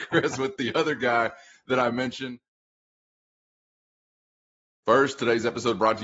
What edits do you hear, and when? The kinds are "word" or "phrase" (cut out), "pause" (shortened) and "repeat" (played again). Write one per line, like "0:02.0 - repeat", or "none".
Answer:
none